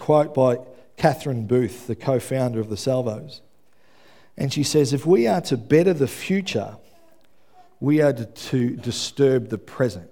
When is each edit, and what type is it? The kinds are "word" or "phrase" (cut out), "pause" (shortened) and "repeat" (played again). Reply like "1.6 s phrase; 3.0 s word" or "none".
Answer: none